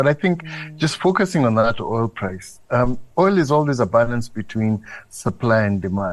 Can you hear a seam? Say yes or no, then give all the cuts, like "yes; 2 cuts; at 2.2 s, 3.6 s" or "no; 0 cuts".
yes; 1 cut; at 3.1 s